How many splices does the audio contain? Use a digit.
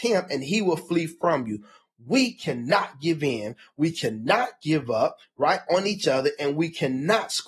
0